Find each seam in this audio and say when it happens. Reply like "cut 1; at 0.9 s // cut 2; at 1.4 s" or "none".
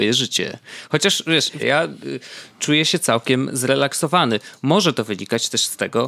cut 1; at 1.6 s

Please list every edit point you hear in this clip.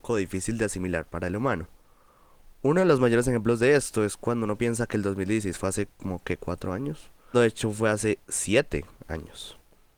cut 1; at 7.3 s

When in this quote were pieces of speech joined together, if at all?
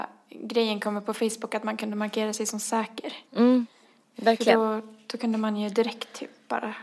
cut 1; at 3.3 s

